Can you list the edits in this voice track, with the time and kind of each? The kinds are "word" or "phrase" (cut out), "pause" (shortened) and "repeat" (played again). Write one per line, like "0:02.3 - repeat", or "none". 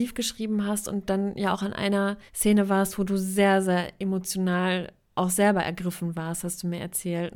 0:02.3 - pause